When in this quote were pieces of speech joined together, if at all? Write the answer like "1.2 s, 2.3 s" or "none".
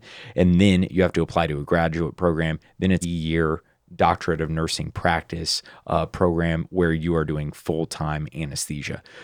3.0 s